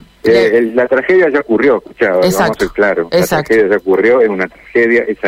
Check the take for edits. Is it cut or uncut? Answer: uncut